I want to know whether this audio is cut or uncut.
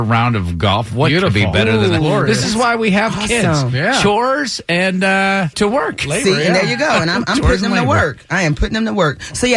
uncut